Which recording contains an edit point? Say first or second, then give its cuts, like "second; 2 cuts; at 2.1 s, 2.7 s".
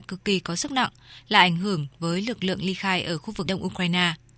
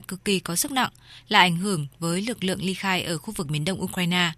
first; 1 cut; at 3.5 s